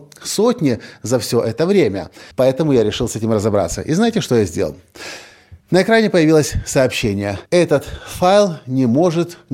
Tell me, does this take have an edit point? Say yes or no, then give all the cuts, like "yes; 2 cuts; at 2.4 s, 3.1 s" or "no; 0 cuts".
yes; 3 cuts; at 2.3 s, 5.6 s, 7.5 s